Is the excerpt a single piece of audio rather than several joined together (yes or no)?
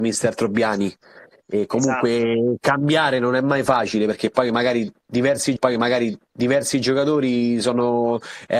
no